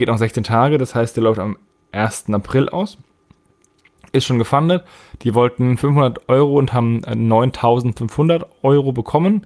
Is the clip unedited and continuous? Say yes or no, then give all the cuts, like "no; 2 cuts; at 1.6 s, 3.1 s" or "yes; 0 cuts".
yes; 0 cuts